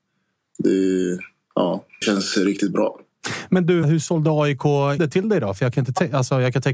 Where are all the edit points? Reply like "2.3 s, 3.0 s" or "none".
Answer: 2.0 s, 3.8 s, 5.0 s